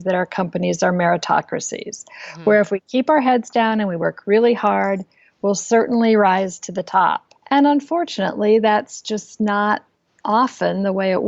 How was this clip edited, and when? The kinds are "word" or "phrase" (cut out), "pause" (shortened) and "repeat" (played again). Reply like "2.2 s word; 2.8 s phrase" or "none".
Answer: 7.4 s pause